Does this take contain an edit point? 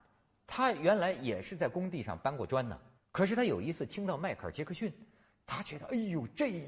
yes; 1 cut; at 3.0 s

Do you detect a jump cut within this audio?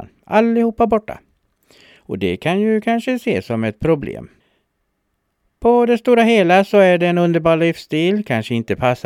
no; 0 cuts

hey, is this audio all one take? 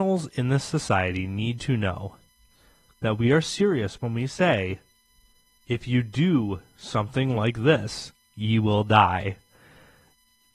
yes; 0 cuts

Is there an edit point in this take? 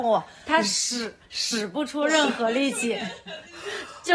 yes; 1 cut; at 1.2 s

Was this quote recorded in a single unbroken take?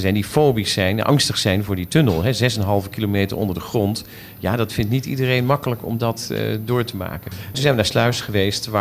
yes; 0 cuts

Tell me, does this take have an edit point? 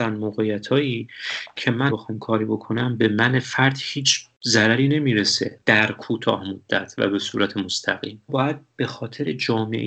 yes; 2 cuts; at 1.9 s, 8.3 s

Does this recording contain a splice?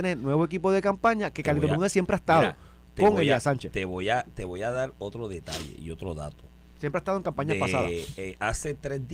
no; 0 cuts

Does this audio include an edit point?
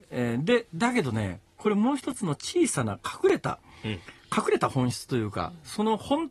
no; 0 cuts

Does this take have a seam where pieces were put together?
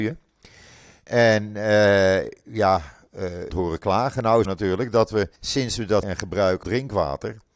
yes; 5 cuts; at 3.5 s, 4.4 s, 5.4 s, 6.0 s, 6.6 s

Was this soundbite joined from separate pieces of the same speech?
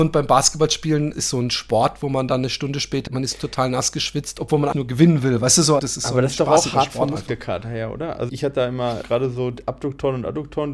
yes; 6 cuts; at 1.1 s, 3.1 s, 4.7 s, 5.8 s, 8.3 s, 9.0 s

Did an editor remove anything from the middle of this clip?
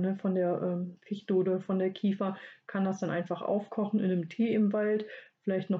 no; 0 cuts

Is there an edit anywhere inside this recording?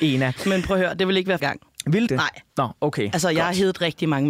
yes; 2 cuts; at 1.4 s, 2.1 s

